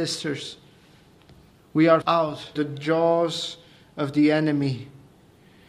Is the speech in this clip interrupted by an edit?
yes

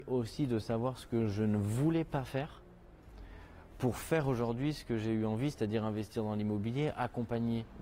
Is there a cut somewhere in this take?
no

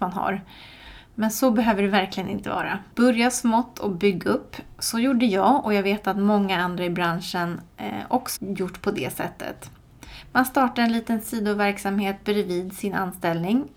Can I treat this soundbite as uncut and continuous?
no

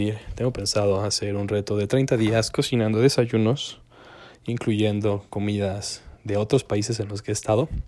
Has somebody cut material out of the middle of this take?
yes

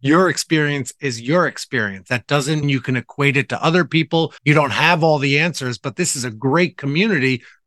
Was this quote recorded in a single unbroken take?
no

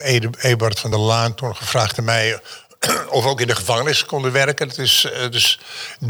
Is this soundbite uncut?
yes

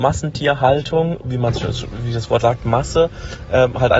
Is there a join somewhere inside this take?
yes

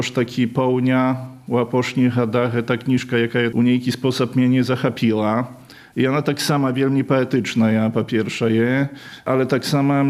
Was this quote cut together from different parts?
no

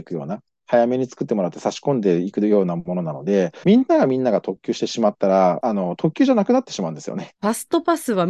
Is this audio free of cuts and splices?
no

